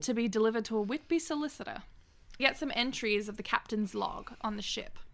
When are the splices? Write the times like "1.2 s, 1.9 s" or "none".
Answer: 2.4 s